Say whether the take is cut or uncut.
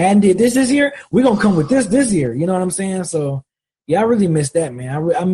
uncut